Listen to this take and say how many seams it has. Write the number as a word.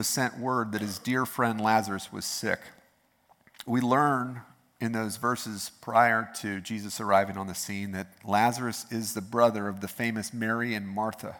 zero